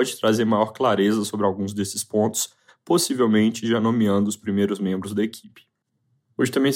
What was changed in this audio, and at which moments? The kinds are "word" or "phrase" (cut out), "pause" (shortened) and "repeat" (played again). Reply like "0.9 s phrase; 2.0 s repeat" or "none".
none

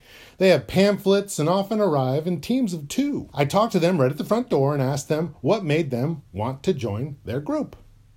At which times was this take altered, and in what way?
3.3 s pause

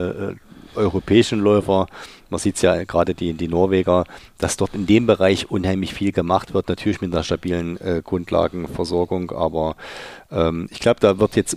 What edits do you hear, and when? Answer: none

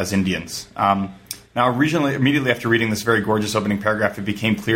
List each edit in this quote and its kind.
none

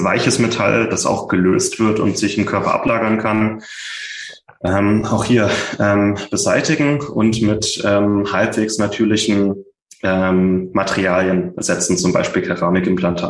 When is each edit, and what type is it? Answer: none

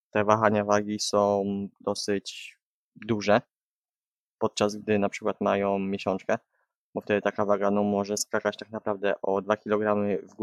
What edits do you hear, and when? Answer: none

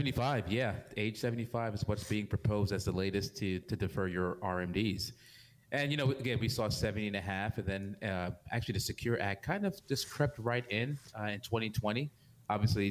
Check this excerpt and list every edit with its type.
3.6 s word

